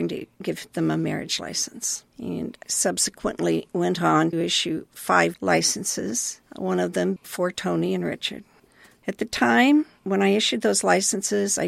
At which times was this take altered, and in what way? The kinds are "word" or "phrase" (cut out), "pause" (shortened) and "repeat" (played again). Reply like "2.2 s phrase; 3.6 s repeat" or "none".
2.6 s word; 4.3 s word; 5.3 s word; 7.2 s word

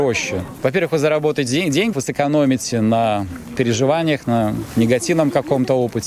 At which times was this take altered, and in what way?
1.9 s word

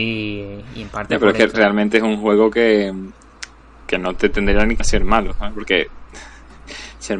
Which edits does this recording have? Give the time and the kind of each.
4.8 s word

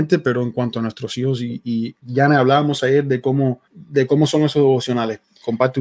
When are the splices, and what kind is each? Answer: 2.0 s pause; 3.7 s pause

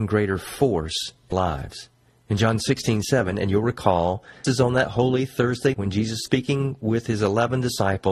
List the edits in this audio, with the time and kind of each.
1.3 s word; 4.4 s word; 5.7 s word; 6.3 s word

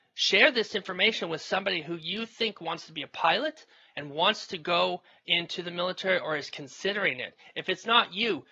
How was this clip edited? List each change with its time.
none

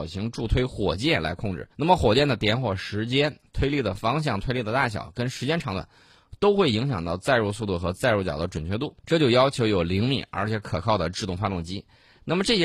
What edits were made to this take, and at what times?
1.7 s pause; 9.0 s pause

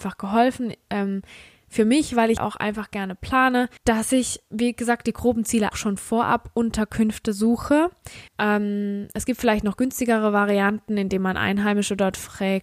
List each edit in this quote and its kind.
2.4 s word; 3.8 s pause; 5.7 s phrase; 8.3 s pause

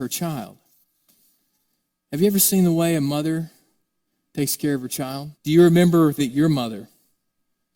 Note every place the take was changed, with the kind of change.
5.3 s pause; 6.2 s word

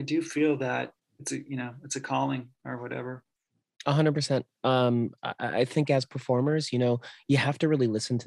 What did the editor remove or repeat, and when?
1.0 s word

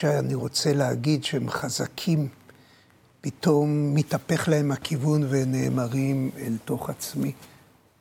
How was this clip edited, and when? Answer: none

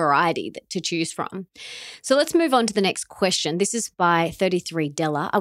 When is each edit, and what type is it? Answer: none

